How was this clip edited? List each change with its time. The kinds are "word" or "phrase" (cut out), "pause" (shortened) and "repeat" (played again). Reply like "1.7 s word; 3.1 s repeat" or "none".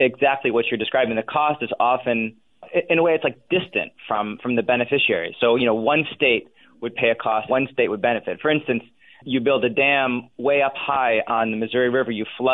7.5 s word